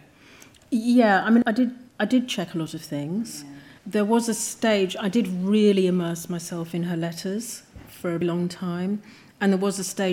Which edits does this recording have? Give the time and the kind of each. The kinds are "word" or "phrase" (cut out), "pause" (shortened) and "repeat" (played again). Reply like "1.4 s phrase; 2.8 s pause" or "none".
1.4 s word; 1.9 s pause; 3.8 s pause; 8.2 s word